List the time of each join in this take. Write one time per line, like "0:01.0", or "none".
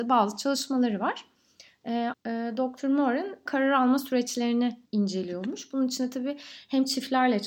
0:02.1
0:03.5
0:04.9